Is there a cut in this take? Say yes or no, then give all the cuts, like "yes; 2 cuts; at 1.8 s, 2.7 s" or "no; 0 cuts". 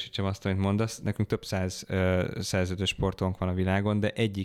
no; 0 cuts